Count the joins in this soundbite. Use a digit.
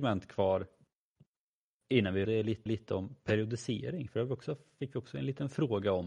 2